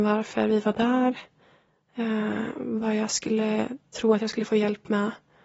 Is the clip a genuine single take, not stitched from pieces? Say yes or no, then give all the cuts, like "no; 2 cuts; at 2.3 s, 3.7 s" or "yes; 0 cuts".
yes; 0 cuts